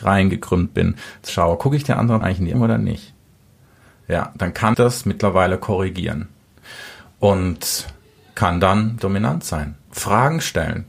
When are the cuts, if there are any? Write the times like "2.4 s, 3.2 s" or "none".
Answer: 1.3 s, 2.2 s, 2.5 s, 4.7 s, 9.0 s, 9.9 s